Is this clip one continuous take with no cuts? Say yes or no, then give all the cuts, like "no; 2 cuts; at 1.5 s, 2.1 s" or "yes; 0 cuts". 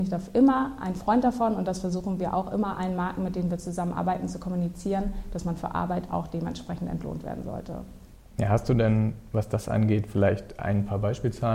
yes; 0 cuts